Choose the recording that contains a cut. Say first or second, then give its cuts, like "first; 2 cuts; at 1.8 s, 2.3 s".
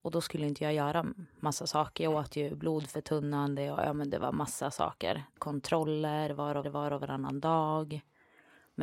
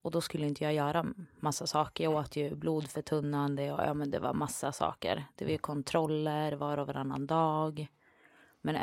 first; 2 cuts; at 5.4 s, 6.6 s